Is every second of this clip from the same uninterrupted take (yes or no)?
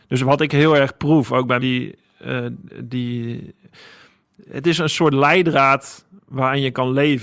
no